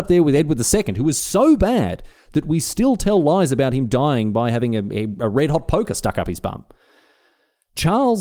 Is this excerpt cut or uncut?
uncut